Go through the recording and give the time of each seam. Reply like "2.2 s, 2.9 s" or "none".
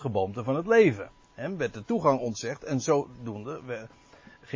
none